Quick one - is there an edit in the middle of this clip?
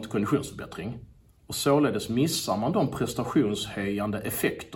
no; 0 cuts

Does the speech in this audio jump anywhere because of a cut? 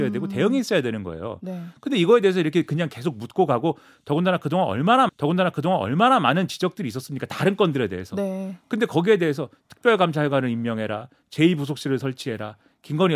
yes; 1 cut; at 5.1 s

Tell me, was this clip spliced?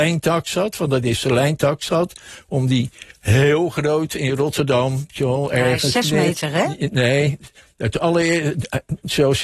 no; 0 cuts

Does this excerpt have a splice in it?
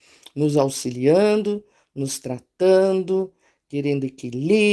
no; 0 cuts

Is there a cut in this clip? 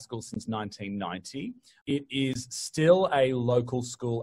no; 0 cuts

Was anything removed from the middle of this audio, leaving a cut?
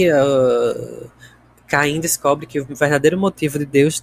no; 0 cuts

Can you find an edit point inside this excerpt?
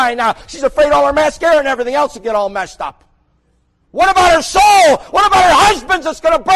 no; 0 cuts

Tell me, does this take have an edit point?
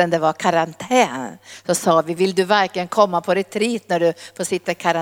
no; 0 cuts

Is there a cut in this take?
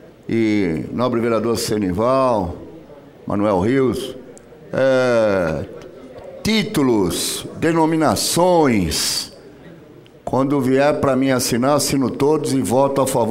no; 0 cuts

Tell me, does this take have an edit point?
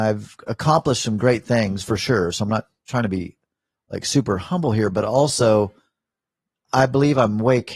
no; 0 cuts

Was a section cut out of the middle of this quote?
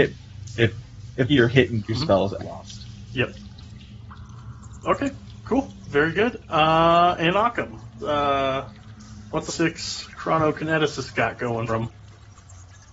yes; 6 cuts; at 1.3 s, 1.8 s, 2.4 s, 8.0 s, 9.5 s, 11.7 s

